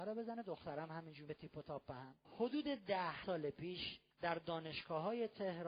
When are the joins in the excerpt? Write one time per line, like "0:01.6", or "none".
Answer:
0:01.3
0:02.2
0:03.2
0:04.1